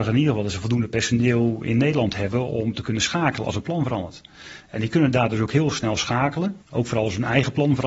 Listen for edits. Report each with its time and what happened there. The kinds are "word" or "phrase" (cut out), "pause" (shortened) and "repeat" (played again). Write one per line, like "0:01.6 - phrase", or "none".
0:06.6 - pause